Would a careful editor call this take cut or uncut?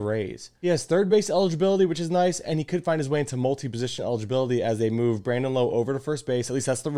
uncut